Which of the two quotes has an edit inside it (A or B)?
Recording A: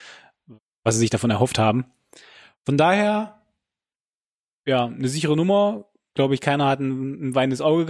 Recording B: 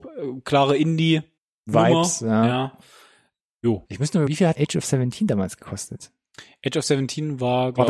B